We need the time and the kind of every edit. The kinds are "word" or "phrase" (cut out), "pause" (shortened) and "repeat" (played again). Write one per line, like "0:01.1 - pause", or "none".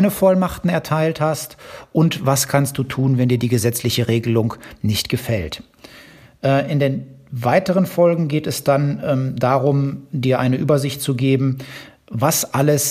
none